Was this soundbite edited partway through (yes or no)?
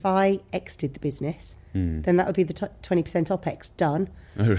no